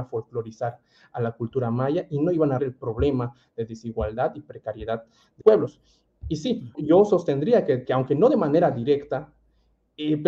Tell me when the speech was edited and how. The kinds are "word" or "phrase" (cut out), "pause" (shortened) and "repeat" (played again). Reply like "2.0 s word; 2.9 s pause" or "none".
2.6 s word; 5.4 s word; 6.7 s word; 7.8 s word